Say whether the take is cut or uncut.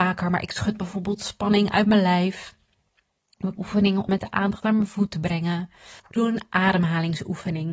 cut